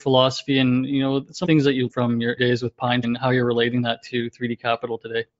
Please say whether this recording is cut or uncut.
cut